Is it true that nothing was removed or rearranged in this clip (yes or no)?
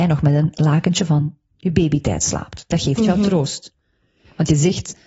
yes